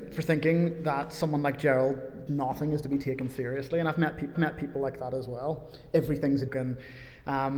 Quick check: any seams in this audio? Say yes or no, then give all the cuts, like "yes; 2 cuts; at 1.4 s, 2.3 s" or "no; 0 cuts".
yes; 3 cuts; at 2.3 s, 4.3 s, 6.5 s